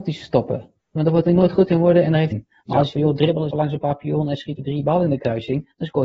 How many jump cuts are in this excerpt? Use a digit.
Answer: 5